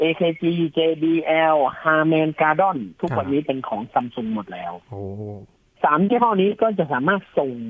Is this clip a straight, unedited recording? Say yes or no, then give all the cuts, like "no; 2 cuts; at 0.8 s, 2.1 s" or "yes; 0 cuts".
yes; 0 cuts